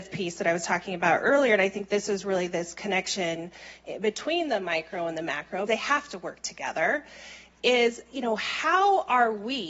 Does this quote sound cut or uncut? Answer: cut